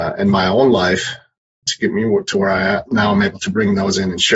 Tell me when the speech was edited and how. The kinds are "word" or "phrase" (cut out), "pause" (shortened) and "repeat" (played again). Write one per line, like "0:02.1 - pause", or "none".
none